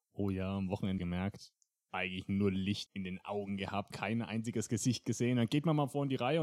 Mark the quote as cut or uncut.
cut